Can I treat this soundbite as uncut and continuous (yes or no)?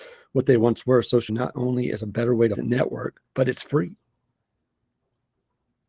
no